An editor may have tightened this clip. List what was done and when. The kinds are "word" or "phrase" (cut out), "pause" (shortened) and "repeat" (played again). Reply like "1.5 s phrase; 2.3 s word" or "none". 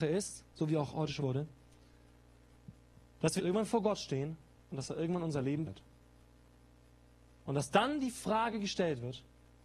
1.2 s word; 3.4 s phrase; 5.6 s word